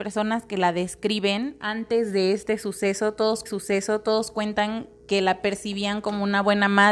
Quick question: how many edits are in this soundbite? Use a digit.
1